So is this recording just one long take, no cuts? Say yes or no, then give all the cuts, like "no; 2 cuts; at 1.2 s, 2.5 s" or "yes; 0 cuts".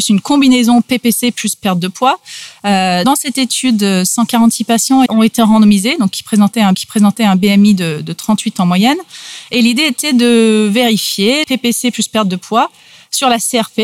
no; 4 cuts; at 3.0 s, 5.1 s, 6.7 s, 11.4 s